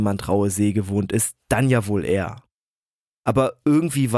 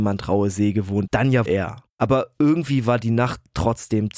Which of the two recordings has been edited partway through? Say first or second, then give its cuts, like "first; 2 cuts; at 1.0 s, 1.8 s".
second; 3 cuts; at 1.1 s, 1.5 s, 1.9 s